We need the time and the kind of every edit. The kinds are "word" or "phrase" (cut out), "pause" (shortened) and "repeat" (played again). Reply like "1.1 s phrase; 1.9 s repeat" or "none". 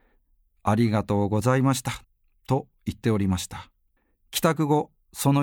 2.0 s pause; 4.0 s pause